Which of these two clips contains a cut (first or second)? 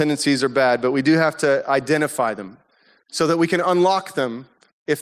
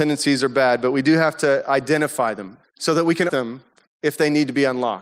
second